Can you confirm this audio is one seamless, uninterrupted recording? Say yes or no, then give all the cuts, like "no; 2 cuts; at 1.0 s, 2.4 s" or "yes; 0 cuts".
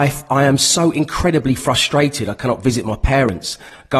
yes; 0 cuts